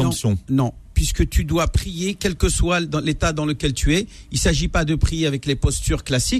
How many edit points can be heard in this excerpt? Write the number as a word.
zero